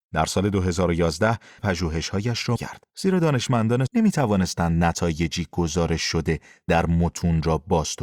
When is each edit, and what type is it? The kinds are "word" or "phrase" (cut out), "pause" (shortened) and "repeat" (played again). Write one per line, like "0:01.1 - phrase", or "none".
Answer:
0:01.6 - phrase
0:02.6 - word
0:02.9 - pause
0:03.9 - word